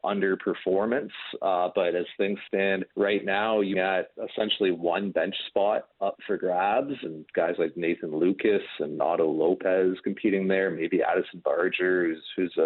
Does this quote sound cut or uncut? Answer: cut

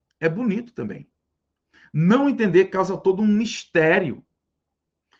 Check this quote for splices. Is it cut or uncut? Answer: uncut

